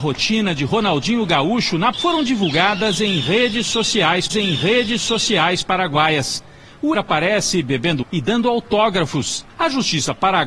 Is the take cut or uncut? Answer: cut